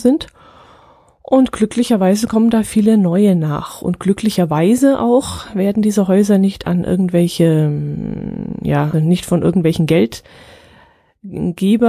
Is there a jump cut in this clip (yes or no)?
yes